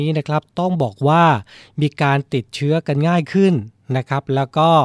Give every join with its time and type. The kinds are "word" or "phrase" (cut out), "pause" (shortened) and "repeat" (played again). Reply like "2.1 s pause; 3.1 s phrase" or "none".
none